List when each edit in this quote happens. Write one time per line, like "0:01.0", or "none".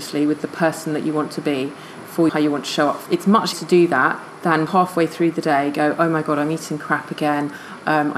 0:02.3
0:03.1
0:03.5
0:04.7